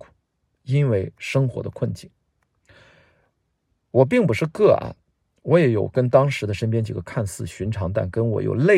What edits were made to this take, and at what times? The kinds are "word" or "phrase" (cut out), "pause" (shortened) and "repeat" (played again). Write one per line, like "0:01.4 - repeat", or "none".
none